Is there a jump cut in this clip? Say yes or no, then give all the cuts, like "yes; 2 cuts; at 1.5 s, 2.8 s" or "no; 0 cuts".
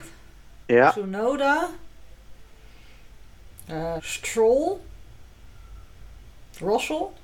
yes; 1 cut; at 4.0 s